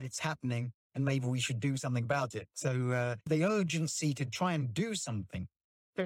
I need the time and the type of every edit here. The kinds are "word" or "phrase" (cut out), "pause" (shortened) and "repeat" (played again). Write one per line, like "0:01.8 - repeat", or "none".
0:02.5 - pause